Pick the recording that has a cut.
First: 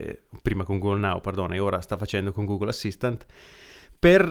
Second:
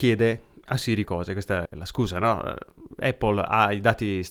second; 2 cuts; at 1.0 s, 1.6 s

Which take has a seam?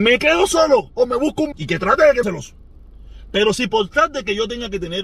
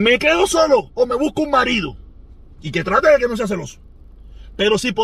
first; 2 cuts; at 1.5 s, 2.2 s

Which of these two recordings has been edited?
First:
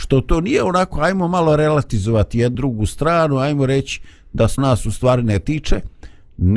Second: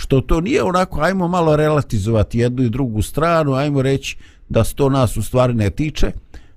first; 2 cuts; at 2.5 s, 4.6 s

